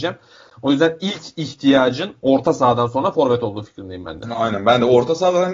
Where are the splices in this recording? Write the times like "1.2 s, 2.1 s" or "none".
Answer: none